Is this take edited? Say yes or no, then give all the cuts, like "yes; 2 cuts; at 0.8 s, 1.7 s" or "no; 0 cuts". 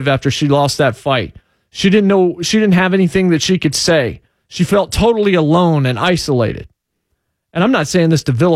no; 0 cuts